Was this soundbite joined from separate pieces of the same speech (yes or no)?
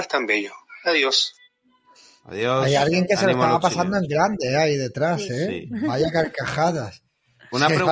no